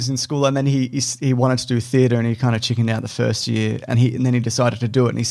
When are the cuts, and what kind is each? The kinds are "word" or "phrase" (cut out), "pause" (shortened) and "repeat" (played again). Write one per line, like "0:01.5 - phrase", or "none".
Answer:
0:03.9 - word